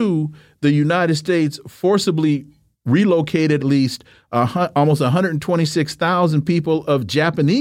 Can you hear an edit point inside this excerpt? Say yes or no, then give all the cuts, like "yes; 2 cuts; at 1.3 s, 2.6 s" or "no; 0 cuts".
yes; 1 cut; at 3.6 s